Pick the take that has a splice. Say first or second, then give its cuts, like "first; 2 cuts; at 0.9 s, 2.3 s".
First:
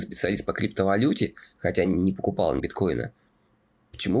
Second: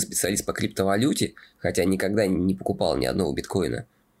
first; 2 cuts; at 1.8 s, 2.6 s